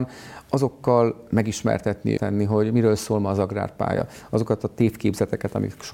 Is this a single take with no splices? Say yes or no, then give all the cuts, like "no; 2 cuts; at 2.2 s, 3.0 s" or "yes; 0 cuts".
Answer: no; 1 cut; at 2.2 s